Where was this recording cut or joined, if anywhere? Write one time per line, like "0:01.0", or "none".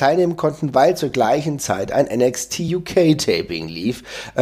none

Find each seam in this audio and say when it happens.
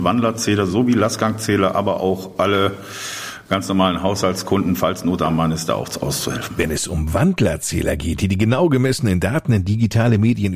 none

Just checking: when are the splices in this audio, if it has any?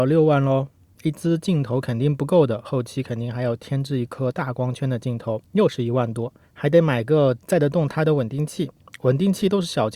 0:05.5
0:06.4

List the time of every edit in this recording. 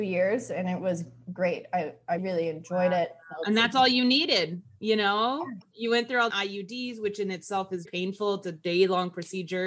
0:02.2
0:06.3
0:07.8

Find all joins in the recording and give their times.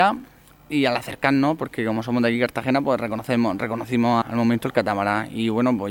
0:04.2

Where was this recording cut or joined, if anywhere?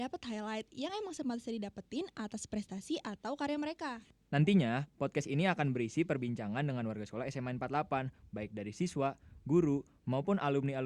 none

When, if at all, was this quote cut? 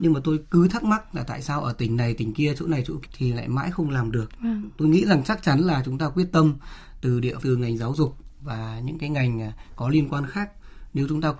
0:03.1
0:07.4

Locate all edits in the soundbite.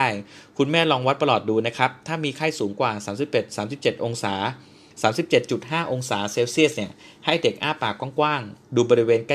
none

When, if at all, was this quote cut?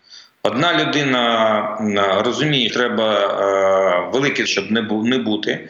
0:02.7
0:04.5

